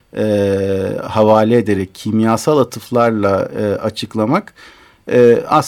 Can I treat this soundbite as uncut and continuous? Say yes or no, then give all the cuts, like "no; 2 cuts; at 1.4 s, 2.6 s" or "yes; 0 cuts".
yes; 0 cuts